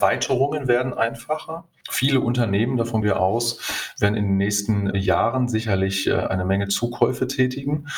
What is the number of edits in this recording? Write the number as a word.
two